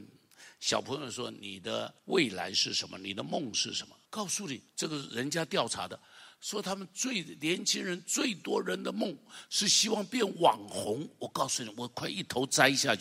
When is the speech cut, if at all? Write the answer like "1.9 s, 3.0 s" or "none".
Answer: 2.0 s, 4.1 s, 4.7 s